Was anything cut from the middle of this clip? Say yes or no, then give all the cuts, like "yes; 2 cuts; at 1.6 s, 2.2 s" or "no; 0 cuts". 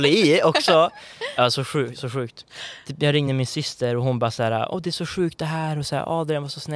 no; 0 cuts